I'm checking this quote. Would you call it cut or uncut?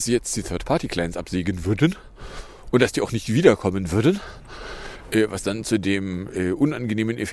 uncut